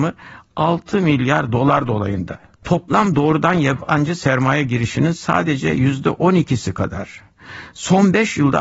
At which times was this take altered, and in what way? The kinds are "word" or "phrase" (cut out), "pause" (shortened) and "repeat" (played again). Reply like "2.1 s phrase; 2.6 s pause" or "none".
none